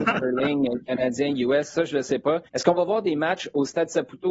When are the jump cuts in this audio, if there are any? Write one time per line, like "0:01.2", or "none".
0:02.5